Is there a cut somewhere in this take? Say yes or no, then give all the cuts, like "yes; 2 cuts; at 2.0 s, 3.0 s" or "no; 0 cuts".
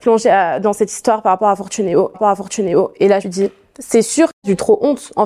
yes; 3 cuts; at 2.1 s, 3.2 s, 4.3 s